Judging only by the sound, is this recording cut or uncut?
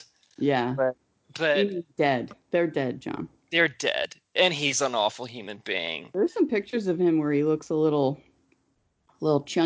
uncut